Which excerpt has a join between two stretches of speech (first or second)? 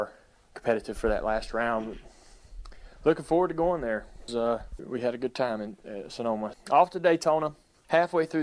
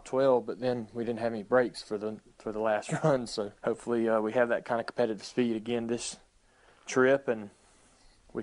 first